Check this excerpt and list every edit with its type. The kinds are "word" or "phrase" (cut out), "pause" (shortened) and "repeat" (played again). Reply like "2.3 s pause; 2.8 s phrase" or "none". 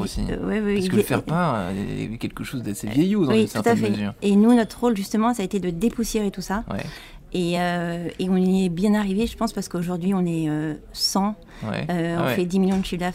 none

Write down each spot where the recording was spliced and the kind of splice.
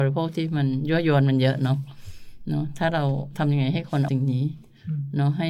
4.1 s word

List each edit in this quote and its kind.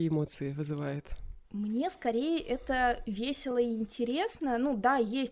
none

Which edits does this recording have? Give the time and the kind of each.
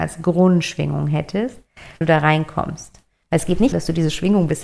2.0 s word; 3.7 s word

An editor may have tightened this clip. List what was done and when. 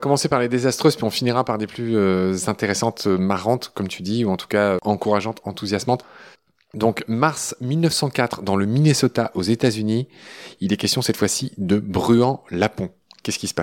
none

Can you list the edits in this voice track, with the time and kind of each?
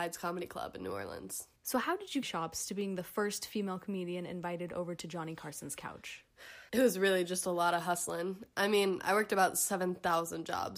1.6 s pause; 2.2 s phrase; 6.7 s pause

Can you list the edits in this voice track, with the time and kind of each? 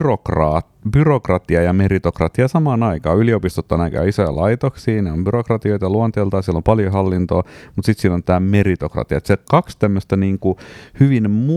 none

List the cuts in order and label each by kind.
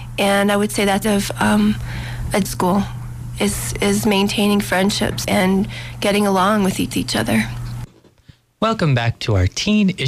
1.0 s phrase; 2.4 s phrase; 5.2 s word; 6.9 s repeat

